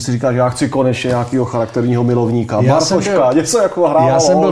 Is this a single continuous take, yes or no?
yes